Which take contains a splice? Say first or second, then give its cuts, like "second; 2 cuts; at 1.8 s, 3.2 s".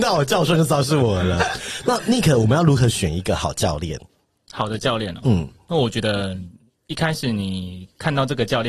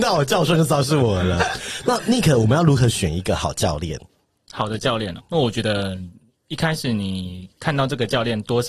second; 1 cut; at 5.2 s